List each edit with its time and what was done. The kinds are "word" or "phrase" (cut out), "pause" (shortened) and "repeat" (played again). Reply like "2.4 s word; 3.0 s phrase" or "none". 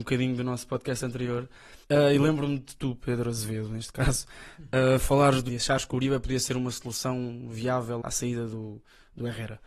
1.8 s pause; 5.5 s phrase; 8.0 s word